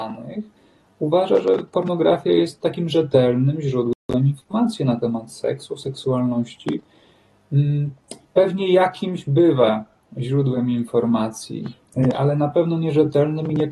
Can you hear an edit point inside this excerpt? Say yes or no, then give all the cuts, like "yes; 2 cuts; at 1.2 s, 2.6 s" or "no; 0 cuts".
no; 0 cuts